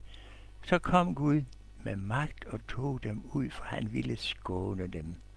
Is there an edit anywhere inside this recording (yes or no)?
no